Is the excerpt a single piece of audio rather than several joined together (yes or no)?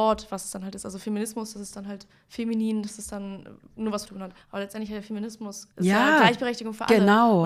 no